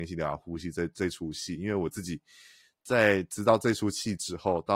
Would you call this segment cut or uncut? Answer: uncut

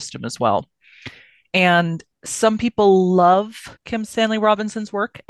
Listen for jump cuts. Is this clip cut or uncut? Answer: cut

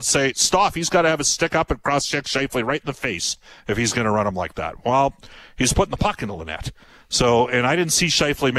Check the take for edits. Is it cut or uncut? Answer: uncut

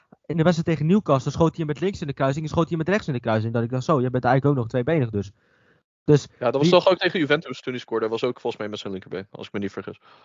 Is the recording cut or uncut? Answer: uncut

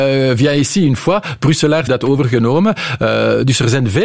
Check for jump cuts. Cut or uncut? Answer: cut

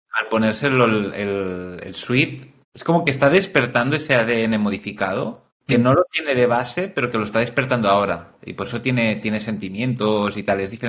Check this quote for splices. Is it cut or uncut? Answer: cut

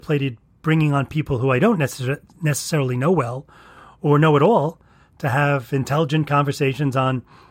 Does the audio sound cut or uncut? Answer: uncut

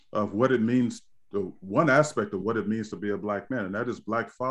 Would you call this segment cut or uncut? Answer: uncut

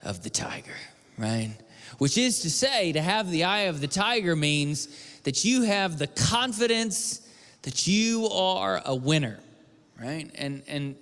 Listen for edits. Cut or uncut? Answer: uncut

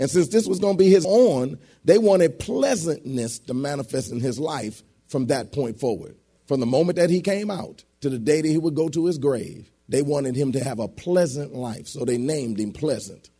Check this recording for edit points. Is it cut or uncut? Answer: cut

